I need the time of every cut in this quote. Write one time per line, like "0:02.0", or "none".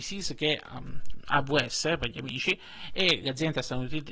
none